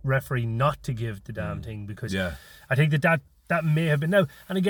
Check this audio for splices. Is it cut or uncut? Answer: uncut